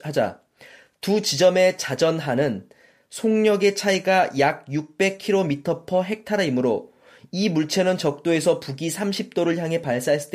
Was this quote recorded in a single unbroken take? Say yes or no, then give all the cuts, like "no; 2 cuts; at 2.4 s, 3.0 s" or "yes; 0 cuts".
yes; 0 cuts